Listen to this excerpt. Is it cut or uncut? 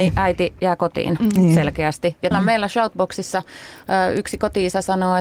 cut